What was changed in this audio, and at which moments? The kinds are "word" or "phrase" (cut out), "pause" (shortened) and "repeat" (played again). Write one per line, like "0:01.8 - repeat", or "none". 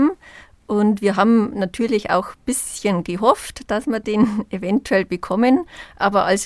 none